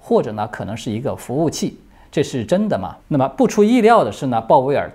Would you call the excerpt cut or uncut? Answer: cut